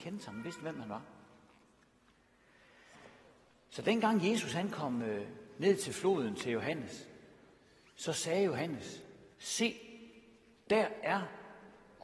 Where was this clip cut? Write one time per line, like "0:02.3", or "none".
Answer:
0:09.3